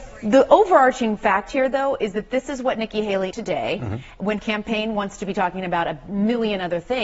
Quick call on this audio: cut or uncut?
cut